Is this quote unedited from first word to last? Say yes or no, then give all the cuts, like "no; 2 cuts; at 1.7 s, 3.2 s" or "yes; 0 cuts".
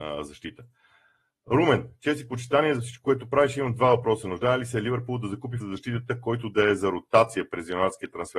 no; 1 cut; at 5.6 s